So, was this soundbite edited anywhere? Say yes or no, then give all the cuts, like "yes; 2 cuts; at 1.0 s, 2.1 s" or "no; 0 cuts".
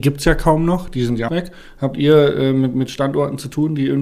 yes; 1 cut; at 1.3 s